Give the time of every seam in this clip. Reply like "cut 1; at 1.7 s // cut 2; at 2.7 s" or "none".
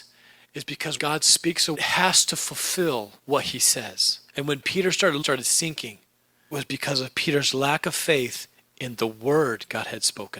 cut 1; at 1.0 s // cut 2; at 1.7 s // cut 3; at 3.2 s // cut 4; at 4.3 s // cut 5; at 5.2 s // cut 6; at 6.5 s